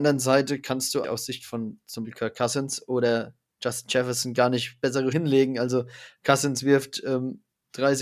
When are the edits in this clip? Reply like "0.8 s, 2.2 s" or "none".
1.0 s, 2.0 s, 5.1 s

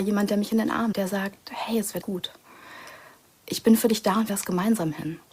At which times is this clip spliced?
0.9 s, 2.0 s, 4.3 s

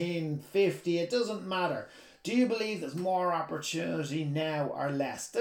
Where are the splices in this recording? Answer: none

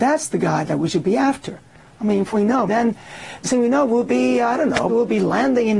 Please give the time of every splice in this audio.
2.3 s, 2.7 s, 3.4 s, 4.9 s

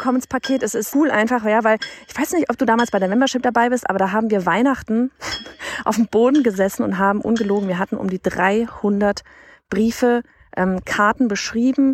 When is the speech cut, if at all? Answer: 0.9 s

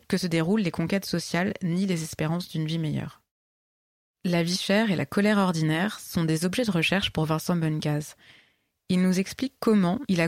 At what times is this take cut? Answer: none

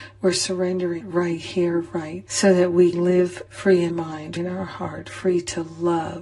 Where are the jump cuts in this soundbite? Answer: 1.0 s, 2.3 s, 2.9 s, 3.5 s, 3.9 s, 4.4 s

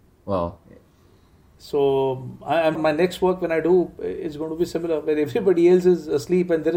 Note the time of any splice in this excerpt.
2.8 s

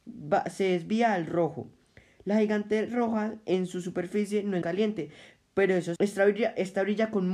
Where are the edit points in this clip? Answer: 4.6 s, 6.0 s

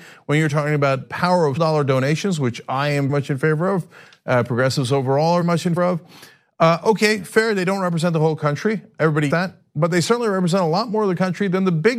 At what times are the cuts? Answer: 1.0 s, 1.6 s, 3.1 s, 5.4 s, 5.8 s, 9.3 s

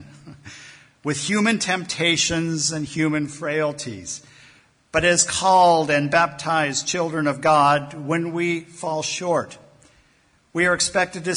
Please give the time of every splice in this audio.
none

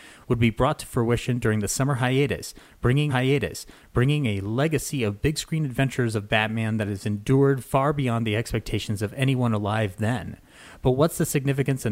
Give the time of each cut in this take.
3.1 s

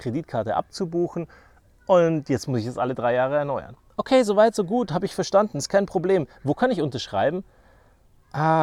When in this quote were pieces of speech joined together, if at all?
none

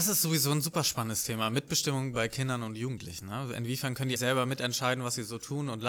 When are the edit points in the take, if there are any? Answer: 4.2 s

